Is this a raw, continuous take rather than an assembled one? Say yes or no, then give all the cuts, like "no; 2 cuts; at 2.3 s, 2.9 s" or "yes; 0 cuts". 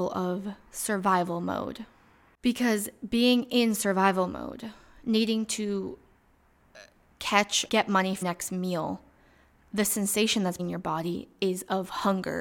no; 3 cuts; at 7.7 s, 8.2 s, 10.6 s